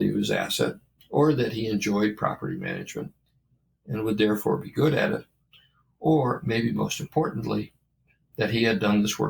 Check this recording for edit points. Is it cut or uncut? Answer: uncut